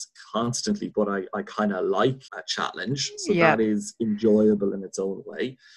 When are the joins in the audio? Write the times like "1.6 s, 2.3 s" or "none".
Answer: 0.9 s, 2.3 s